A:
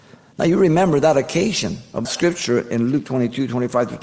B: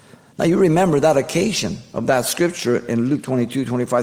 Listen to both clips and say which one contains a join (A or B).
A